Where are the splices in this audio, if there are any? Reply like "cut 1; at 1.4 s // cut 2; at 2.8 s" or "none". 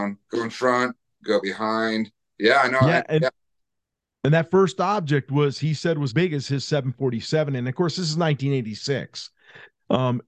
cut 1; at 6.1 s